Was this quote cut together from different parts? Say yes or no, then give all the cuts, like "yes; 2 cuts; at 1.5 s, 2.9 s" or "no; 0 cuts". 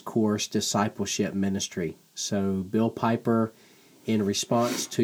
no; 0 cuts